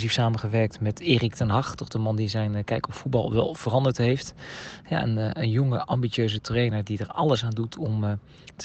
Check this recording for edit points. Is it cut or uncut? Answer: uncut